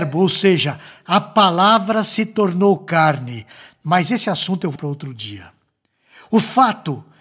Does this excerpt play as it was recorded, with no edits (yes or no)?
no